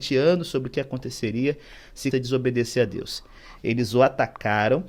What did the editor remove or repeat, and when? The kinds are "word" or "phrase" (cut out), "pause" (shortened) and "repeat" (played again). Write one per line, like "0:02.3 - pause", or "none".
0:02.1 - word